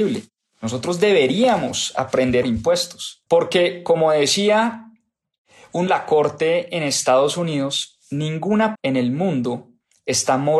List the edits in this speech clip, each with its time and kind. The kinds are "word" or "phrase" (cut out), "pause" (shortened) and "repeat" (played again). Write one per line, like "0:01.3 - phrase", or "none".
0:02.4 - phrase
0:03.3 - pause
0:05.9 - phrase
0:08.7 - word